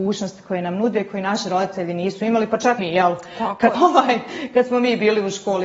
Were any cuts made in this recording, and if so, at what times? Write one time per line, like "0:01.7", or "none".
0:02.8
0:03.7

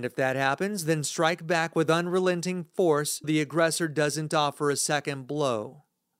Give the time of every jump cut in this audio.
0:03.2

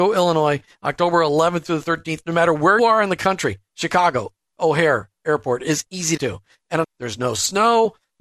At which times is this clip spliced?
0:02.8
0:06.2
0:06.8

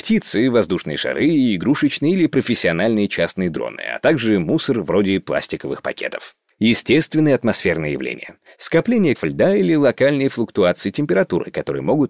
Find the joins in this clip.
0:09.1

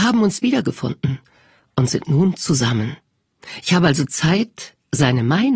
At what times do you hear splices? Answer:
none

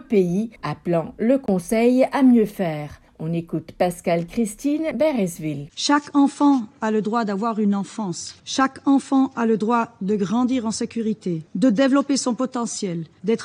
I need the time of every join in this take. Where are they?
none

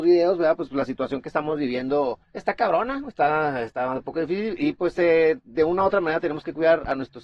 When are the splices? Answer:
0:02.2

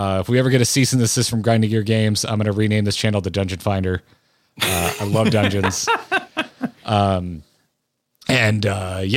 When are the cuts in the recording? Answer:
none

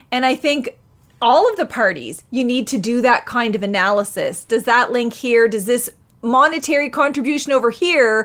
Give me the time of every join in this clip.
none

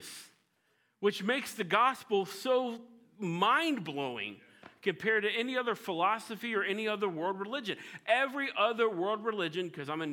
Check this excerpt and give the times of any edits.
none

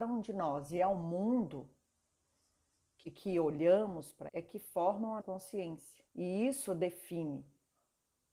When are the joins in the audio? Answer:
0:03.0
0:04.3
0:05.2
0:06.1

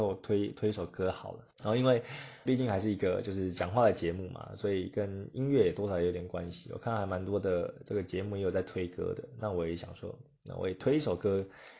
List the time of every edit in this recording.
0:01.5
0:02.5

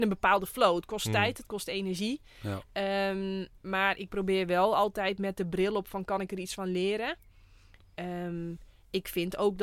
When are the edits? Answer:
none

